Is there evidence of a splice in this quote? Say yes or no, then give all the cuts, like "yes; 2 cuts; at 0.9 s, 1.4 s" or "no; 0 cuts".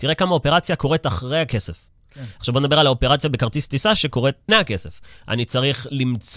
yes; 1 cut; at 4.5 s